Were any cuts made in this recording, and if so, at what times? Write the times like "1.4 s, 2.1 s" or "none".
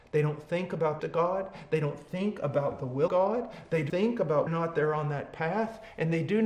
1.0 s, 3.1 s, 3.9 s, 4.5 s